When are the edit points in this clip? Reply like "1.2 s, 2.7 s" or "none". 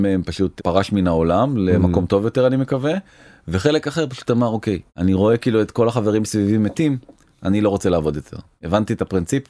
none